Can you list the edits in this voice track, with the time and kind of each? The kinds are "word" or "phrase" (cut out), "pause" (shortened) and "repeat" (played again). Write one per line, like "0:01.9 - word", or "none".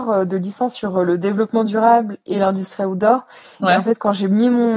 none